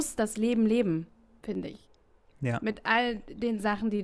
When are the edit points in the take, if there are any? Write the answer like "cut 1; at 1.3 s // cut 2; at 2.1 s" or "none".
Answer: cut 1; at 1.4 s